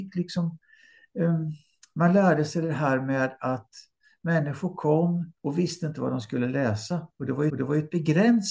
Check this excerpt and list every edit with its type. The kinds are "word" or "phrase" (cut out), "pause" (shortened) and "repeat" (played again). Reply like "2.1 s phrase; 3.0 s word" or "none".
5.4 s pause; 7.5 s repeat